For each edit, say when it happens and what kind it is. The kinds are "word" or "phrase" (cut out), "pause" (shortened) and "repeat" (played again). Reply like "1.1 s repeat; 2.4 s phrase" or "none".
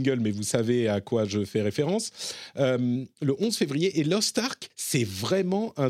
4.7 s pause